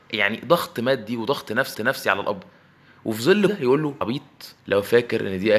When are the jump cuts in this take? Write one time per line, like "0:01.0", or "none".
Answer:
0:01.7
0:03.5
0:04.0
0:04.6